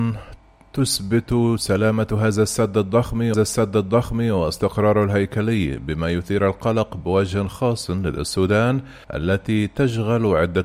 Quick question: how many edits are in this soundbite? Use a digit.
2